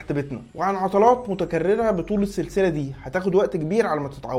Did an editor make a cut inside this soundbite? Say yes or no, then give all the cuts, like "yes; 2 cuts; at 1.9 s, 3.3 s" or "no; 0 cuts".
no; 0 cuts